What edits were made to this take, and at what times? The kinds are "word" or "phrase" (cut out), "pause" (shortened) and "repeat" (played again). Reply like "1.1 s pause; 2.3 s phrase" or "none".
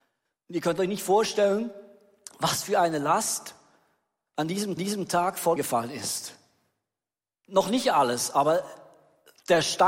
4.8 s repeat; 5.6 s word